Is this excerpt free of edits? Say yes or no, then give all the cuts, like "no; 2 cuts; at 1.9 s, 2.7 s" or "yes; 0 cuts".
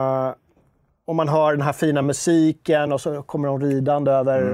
yes; 0 cuts